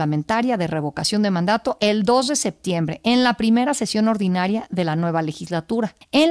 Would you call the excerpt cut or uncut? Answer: uncut